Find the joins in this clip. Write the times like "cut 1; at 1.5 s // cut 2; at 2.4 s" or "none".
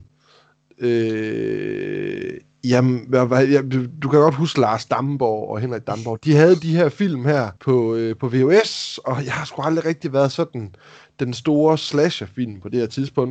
cut 1; at 7.6 s